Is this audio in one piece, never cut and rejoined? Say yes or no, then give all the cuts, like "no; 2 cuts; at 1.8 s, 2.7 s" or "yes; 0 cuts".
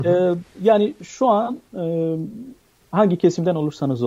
yes; 0 cuts